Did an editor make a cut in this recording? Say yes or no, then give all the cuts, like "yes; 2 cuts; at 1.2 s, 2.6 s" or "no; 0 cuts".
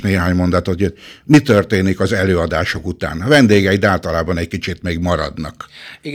no; 0 cuts